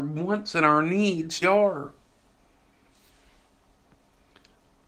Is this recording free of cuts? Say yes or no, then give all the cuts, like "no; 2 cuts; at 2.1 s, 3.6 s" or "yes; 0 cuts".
no; 1 cut; at 1.4 s